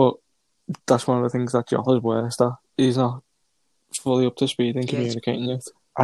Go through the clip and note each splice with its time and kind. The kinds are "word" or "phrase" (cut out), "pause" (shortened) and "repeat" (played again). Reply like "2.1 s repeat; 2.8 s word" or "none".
none